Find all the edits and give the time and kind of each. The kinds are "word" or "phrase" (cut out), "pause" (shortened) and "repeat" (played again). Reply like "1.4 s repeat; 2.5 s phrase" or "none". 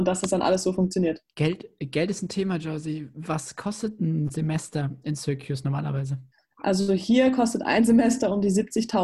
1.3 s pause; 6.3 s pause

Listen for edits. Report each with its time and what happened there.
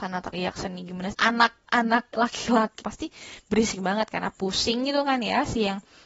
1.1 s word; 2.1 s word; 2.8 s phrase

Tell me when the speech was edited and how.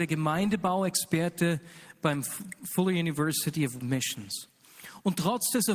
3.8 s word

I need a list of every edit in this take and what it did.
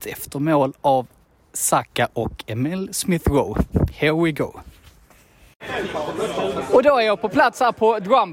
none

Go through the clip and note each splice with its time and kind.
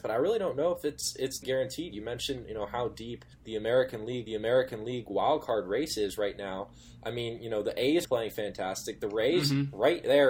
1.4 s word; 3.3 s pause; 4.3 s repeat; 8.0 s phrase

